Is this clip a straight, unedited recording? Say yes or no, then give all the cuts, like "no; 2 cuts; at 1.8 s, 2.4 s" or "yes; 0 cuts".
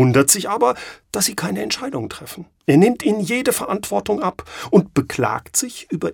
no; 2 cuts; at 1.0 s, 2.6 s